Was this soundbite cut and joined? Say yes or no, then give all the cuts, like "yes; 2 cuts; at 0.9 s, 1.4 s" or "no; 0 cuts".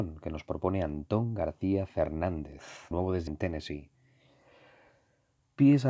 yes; 2 cuts; at 2.9 s, 3.3 s